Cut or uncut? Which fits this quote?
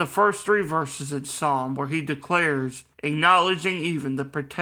cut